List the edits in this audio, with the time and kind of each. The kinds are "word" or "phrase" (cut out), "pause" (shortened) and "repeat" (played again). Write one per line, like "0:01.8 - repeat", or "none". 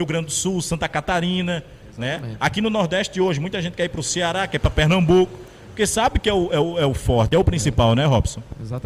none